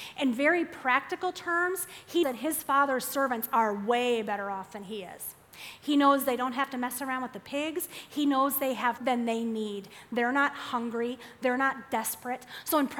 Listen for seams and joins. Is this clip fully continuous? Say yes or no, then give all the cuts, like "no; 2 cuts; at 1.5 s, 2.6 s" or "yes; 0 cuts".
no; 2 cuts; at 2.2 s, 9.0 s